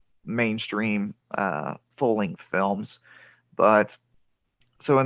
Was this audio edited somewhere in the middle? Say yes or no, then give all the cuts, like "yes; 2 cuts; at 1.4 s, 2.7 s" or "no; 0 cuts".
no; 0 cuts